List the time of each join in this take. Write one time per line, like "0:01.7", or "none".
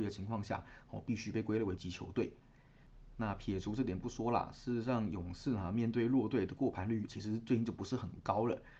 0:01.8
0:07.1